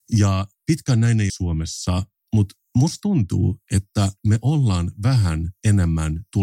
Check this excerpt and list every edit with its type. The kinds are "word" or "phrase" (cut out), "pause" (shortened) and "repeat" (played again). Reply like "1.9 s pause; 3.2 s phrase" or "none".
1.3 s word